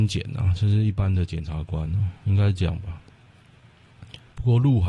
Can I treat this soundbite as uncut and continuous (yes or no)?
yes